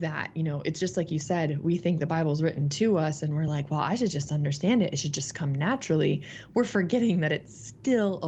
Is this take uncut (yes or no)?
yes